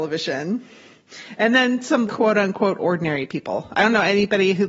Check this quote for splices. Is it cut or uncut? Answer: cut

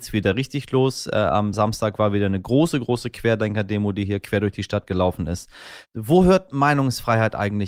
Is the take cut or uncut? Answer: uncut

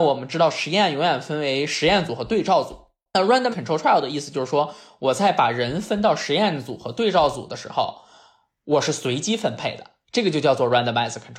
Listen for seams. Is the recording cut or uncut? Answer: cut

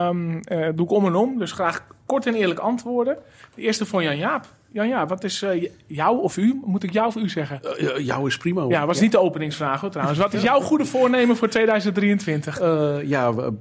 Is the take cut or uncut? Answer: uncut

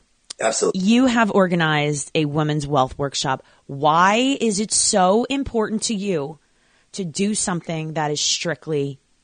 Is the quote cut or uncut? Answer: uncut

